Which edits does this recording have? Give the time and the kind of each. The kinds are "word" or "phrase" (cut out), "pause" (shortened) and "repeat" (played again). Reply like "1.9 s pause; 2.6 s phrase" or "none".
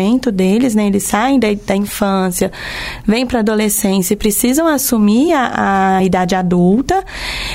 none